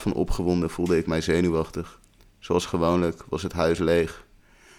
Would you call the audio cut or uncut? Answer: uncut